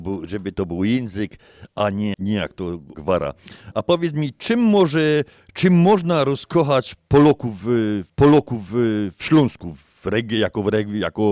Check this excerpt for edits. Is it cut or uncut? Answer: cut